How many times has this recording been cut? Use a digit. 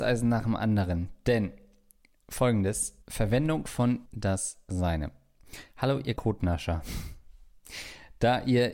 3